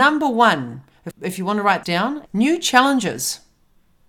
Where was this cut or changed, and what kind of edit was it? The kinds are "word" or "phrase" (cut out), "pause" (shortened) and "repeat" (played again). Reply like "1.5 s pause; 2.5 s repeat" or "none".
1.1 s word; 1.8 s word; 2.3 s word

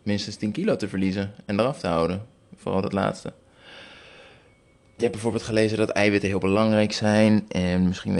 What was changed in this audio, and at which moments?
none

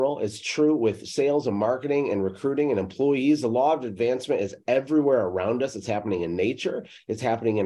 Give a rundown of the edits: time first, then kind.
none

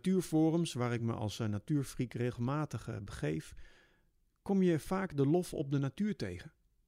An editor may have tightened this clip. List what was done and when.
none

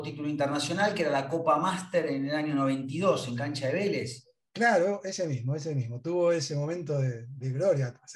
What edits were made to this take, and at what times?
none

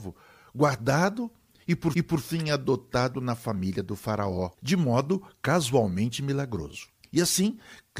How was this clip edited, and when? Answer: 1.9 s repeat; 4.5 s pause; 7.0 s pause

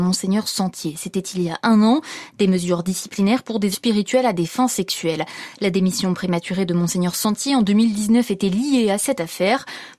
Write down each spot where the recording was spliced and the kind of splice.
3.7 s word

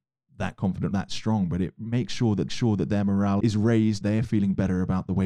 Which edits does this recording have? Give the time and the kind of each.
0.9 s word; 2.5 s repeat; 3.4 s word; 4.0 s phrase

